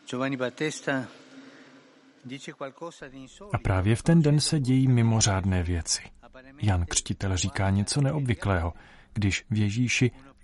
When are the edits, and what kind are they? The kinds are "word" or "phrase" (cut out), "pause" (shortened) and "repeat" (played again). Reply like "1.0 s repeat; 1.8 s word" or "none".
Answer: none